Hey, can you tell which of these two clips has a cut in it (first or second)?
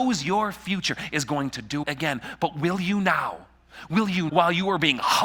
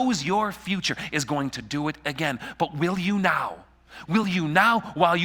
first